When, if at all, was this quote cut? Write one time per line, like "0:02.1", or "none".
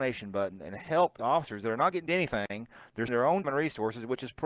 0:01.2
0:02.1
0:03.1
0:03.4